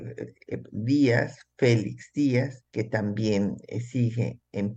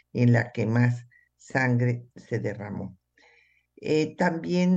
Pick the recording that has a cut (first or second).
first